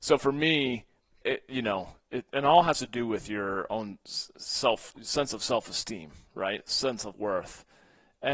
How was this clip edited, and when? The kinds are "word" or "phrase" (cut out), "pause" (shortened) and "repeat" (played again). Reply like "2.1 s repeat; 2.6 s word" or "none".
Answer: 1.2 s word; 7.1 s word